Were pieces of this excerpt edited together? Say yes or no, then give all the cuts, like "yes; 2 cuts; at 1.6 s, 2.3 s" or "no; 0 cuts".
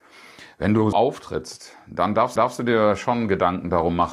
yes; 2 cuts; at 0.9 s, 2.4 s